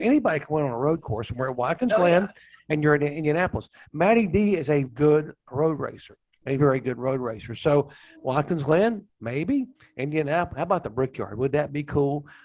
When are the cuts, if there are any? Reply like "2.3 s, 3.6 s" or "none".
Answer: 4.8 s, 6.6 s, 8.1 s